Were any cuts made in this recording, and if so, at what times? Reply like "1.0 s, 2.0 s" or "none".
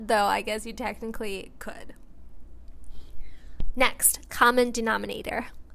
4.3 s

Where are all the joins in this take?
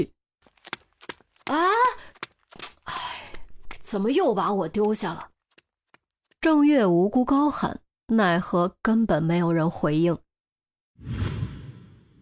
none

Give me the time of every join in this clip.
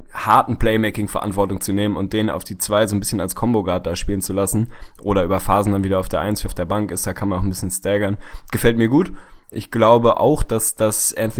6.5 s

